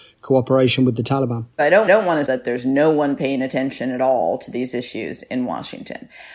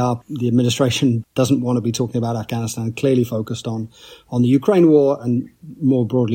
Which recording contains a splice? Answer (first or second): first